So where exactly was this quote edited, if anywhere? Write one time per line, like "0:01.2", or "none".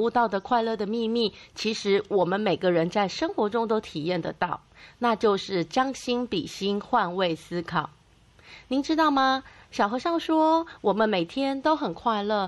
none